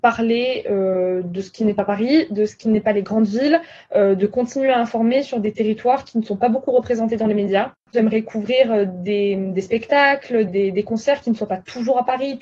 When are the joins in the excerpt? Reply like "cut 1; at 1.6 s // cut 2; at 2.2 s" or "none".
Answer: cut 1; at 10.5 s